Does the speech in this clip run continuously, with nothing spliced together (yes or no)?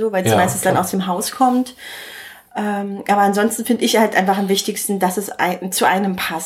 yes